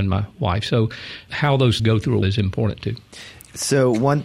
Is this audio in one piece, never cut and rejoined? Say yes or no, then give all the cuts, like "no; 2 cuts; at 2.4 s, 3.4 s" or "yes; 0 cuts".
no; 3 cuts; at 1.3 s, 1.8 s, 2.2 s